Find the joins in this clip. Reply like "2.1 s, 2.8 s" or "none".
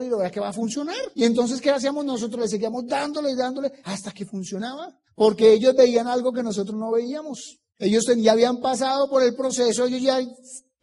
1.1 s, 3.8 s, 5.1 s, 7.7 s